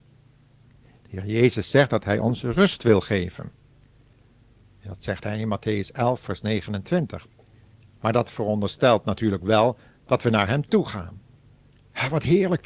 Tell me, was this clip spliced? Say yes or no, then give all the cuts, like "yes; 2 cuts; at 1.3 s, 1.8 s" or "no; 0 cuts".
no; 0 cuts